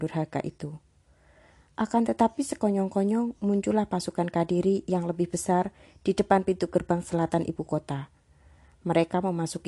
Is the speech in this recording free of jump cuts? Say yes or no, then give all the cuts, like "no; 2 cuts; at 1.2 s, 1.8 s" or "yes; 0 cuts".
yes; 0 cuts